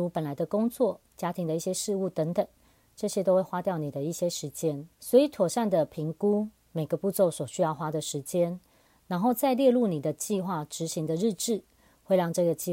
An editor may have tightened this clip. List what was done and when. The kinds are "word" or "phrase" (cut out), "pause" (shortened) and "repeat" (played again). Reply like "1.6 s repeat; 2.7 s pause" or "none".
1.1 s pause; 4.9 s pause